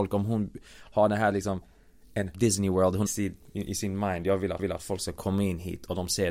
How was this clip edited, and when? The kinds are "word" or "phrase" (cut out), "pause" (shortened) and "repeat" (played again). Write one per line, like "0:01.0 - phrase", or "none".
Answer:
0:02.3 - phrase
0:03.1 - phrase
0:04.6 - repeat